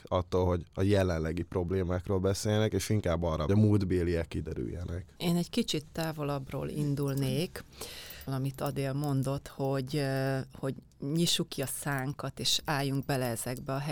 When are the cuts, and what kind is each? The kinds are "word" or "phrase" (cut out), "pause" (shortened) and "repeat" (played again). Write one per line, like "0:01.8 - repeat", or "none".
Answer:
0:03.5 - phrase
0:08.3 - phrase